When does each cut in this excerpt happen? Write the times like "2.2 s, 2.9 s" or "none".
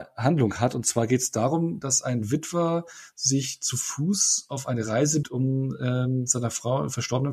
5.2 s